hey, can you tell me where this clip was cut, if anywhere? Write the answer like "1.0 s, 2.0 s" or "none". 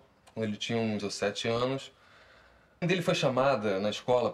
1.0 s, 2.8 s

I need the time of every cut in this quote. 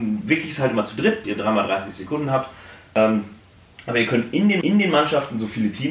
1.2 s, 4.6 s

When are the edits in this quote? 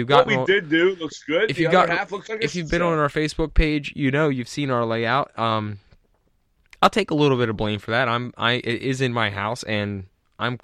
none

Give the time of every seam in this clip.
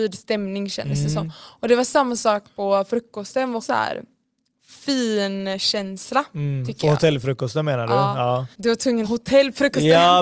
3.6 s, 8.5 s, 9.0 s

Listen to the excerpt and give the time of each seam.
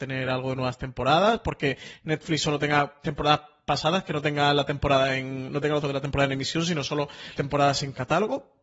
5.8 s, 7.4 s

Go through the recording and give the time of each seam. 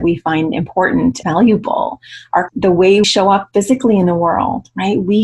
1.2 s, 2.5 s, 3.0 s

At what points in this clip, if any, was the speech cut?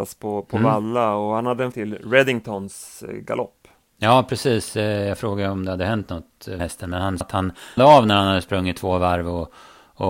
1.7 s, 6.6 s, 7.2 s, 7.8 s

